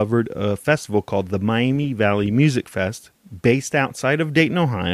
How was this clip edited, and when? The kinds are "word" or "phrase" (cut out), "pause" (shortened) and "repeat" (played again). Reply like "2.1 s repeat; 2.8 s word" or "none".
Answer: none

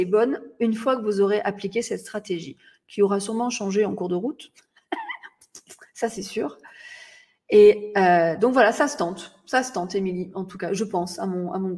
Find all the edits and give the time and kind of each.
none

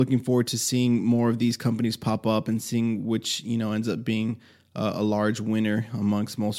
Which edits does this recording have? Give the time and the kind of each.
none

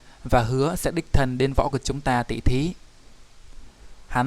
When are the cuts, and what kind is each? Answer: 1.7 s word

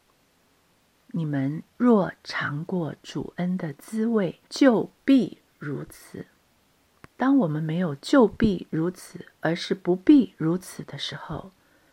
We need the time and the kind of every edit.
4.5 s pause; 7.1 s pause; 9.3 s pause

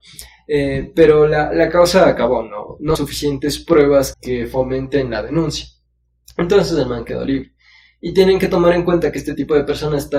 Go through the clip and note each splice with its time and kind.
3.0 s phrase; 4.1 s word

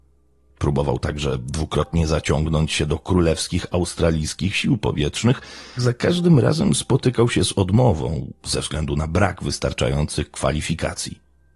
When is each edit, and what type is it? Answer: 5.8 s word

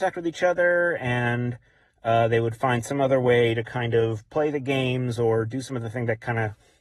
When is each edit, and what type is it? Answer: none

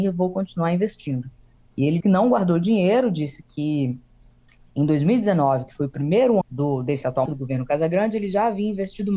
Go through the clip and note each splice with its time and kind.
2.0 s word; 6.4 s word; 7.3 s word

